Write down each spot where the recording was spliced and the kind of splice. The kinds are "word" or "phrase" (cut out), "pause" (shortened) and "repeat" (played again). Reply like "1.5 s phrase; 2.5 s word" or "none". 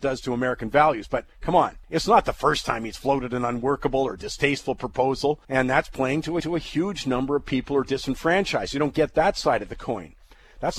1.8 s pause; 5.4 s pause; 6.4 s repeat